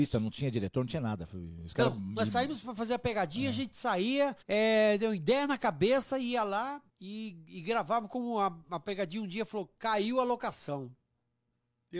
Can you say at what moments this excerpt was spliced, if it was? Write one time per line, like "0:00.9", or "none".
0:04.4
0:06.9